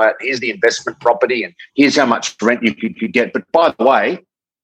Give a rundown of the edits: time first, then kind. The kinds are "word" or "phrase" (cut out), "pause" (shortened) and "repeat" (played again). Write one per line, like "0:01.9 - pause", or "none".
0:02.9 - repeat